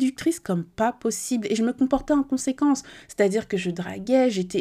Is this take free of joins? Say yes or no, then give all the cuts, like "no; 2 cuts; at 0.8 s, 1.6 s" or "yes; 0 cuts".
yes; 0 cuts